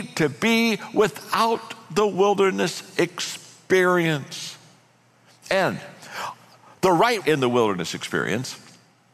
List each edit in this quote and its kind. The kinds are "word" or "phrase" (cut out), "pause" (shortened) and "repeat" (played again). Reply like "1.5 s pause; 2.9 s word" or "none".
7.2 s phrase